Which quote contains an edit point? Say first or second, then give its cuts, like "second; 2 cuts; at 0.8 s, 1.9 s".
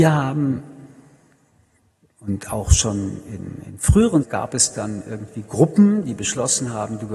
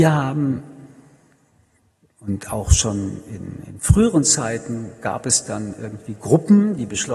first; 1 cut; at 4.2 s